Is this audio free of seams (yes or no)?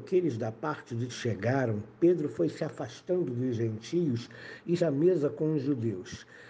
no